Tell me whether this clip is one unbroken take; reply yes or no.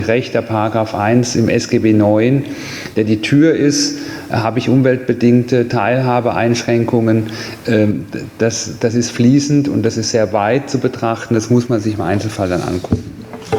yes